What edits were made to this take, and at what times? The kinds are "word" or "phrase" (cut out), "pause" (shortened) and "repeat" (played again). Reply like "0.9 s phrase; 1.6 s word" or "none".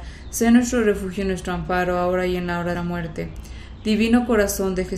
2.7 s phrase